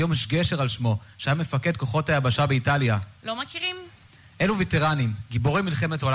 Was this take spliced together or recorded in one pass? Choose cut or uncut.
uncut